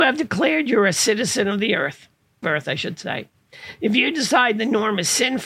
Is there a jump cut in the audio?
yes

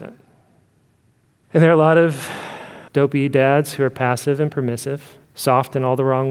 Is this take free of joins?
no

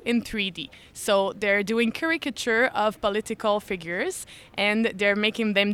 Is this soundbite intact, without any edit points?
yes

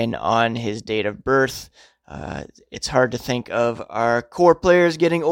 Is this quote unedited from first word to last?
yes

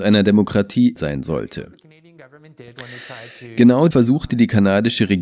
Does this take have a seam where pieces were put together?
yes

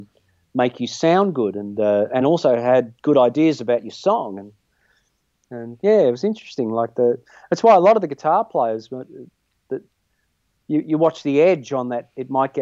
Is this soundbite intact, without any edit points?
yes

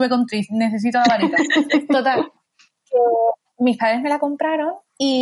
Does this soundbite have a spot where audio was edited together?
no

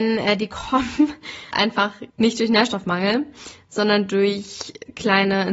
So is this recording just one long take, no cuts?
no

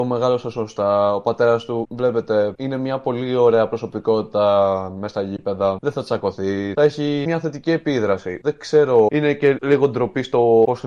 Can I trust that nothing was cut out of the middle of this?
yes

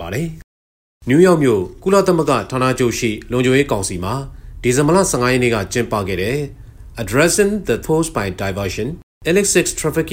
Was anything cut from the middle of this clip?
yes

